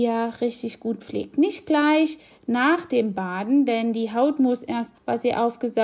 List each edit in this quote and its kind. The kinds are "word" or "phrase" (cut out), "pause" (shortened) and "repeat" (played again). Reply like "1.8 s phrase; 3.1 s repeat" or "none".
4.9 s phrase